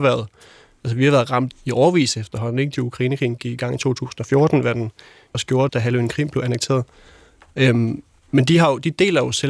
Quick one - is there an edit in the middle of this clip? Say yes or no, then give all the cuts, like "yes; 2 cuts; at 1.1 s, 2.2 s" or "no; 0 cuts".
yes; 4 cuts; at 1.5 s, 2.8 s, 5.3 s, 5.7 s